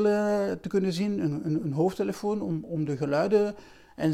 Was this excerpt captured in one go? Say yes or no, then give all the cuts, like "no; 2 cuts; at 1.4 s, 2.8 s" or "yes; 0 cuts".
yes; 0 cuts